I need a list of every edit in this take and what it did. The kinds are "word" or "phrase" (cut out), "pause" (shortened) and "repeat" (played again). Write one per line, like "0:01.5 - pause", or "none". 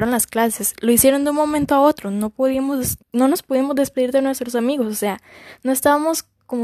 0:03.0 - pause